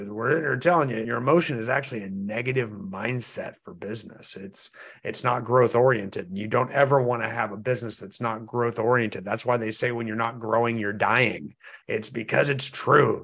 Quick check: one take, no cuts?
no; 2 cuts; at 1.0 s, 11.8 s

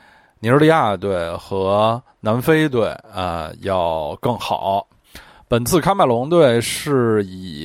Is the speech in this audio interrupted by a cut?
no; 0 cuts

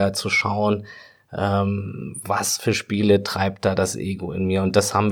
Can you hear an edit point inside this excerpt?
no; 0 cuts

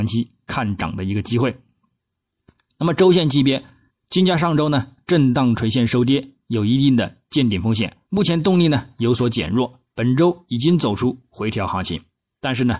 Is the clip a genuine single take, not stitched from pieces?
no; 2 cuts; at 3.9 s, 8.0 s

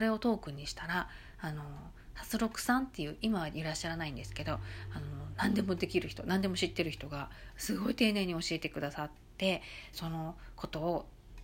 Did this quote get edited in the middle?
yes; 1 cut; at 9.9 s

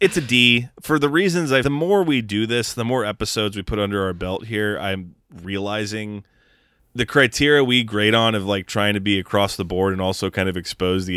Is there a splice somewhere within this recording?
yes; 1 cut; at 1.6 s

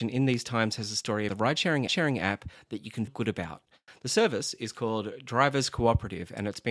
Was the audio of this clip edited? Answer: yes; 3 cuts; at 1.3 s, 1.9 s, 3.1 s

